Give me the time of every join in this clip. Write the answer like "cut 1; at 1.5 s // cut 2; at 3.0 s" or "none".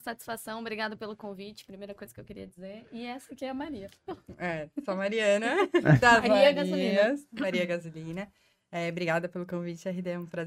none